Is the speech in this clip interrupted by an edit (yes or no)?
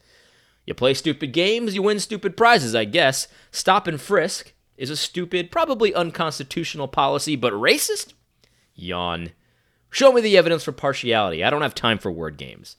no